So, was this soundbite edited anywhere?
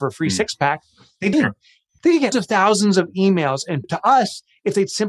yes; 3 cuts; at 1.3 s, 2.3 s, 3.8 s

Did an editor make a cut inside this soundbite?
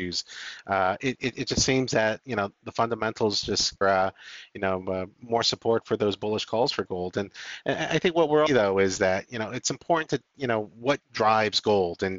yes; 2 cuts; at 3.8 s, 8.5 s

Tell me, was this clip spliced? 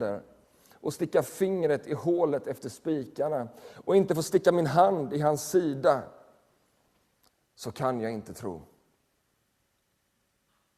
no; 0 cuts

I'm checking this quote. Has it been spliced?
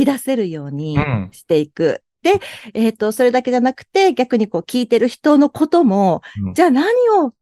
no; 0 cuts

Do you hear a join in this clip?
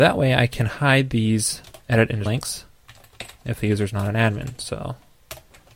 yes; 3 cuts; at 1.8 s, 2.3 s, 3.4 s

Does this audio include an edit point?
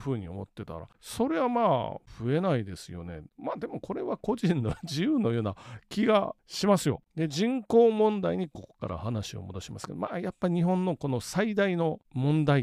no; 0 cuts

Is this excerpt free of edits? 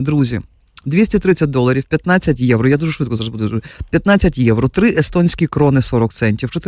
yes; 0 cuts

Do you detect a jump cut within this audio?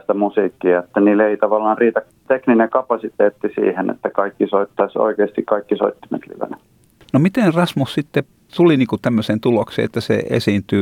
no; 0 cuts

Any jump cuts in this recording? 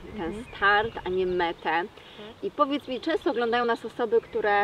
no; 0 cuts

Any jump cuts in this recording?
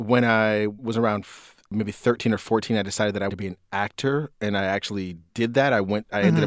yes; 1 cut; at 3.3 s

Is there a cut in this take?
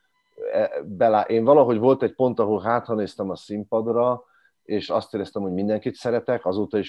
no; 0 cuts

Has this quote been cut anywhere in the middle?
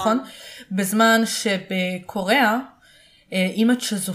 no; 0 cuts

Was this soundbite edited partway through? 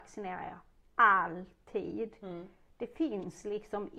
no; 0 cuts

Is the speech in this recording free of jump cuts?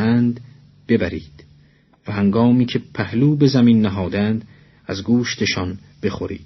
yes; 0 cuts

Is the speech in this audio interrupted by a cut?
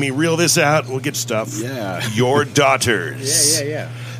yes; 1 cut; at 1.1 s

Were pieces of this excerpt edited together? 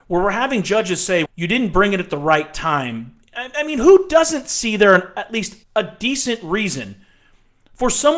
yes; 2 cuts; at 1.3 s, 5.6 s

